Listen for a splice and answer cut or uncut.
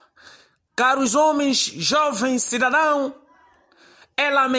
uncut